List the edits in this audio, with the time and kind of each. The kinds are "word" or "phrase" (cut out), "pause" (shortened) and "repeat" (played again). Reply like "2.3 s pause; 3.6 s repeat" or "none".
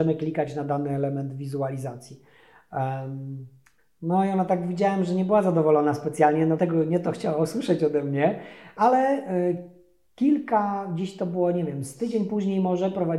6.6 s phrase